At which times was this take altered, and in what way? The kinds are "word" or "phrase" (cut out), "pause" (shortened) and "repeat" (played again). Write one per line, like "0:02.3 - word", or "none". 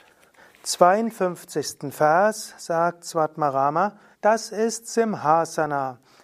0:04.1 - pause